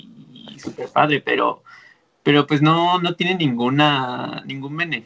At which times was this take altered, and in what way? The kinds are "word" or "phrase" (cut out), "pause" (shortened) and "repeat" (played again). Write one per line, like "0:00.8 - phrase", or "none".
none